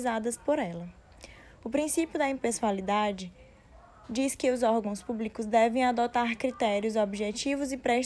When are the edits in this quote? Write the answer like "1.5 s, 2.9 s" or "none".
none